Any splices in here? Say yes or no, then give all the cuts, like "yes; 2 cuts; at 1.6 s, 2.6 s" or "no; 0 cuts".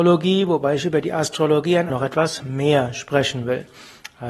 yes; 1 cut; at 1.9 s